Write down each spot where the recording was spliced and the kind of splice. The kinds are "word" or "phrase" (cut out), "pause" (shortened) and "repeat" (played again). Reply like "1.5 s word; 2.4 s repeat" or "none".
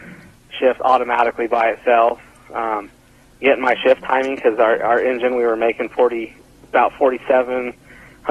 none